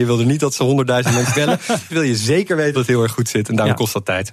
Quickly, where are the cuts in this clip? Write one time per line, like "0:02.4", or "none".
0:01.3
0:01.9
0:02.7